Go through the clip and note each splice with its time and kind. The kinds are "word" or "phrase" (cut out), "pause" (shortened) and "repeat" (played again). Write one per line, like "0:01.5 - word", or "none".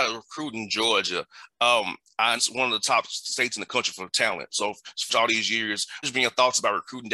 0:02.4 - word
0:05.1 - phrase
0:06.0 - word